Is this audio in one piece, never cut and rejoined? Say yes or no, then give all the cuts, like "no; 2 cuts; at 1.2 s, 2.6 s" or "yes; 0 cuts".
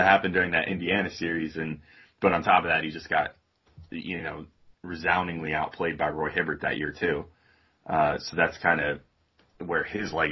yes; 0 cuts